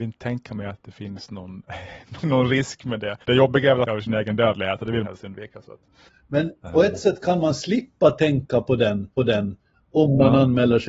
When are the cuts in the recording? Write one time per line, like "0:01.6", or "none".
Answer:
0:02.2
0:03.2
0:03.8
0:05.0
0:06.1
0:09.2

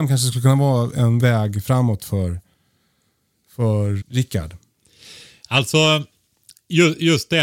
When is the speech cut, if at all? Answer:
0:01.2
0:04.0

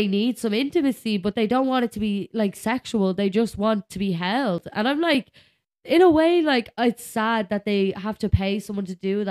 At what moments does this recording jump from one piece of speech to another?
none

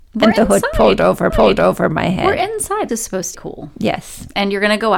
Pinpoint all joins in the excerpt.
0:01.3
0:02.9
0:03.3

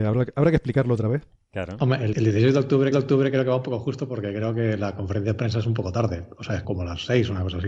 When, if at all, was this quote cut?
0:02.1
0:02.9
0:06.6

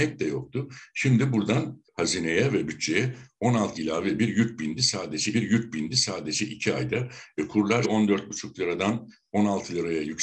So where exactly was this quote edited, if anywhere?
0:01.9
0:03.8
0:05.3
0:07.8

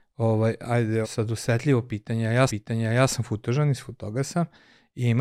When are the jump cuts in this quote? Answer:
0:01.0
0:02.5

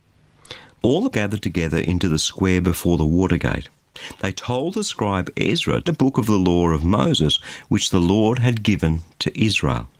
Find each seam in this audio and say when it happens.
0:01.1
0:05.9

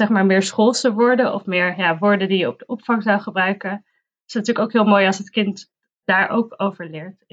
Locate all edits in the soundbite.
none

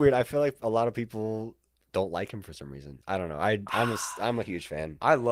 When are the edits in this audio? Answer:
none

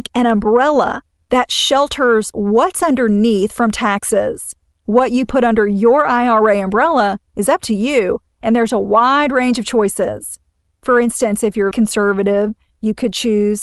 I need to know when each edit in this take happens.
0:11.7

